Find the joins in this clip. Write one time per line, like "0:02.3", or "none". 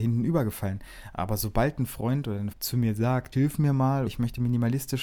0:02.5
0:03.3
0:04.1